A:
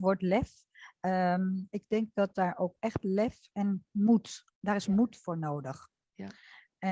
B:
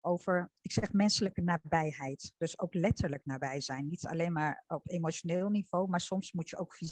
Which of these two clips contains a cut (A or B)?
A